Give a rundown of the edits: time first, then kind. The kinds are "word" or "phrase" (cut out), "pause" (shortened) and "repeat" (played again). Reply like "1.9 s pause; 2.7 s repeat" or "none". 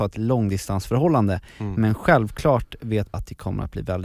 3.1 s word